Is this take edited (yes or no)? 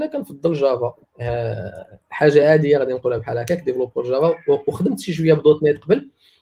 no